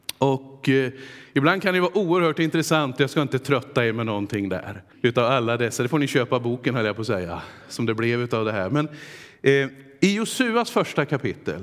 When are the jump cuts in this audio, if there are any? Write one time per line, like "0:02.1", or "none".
0:04.9
0:07.6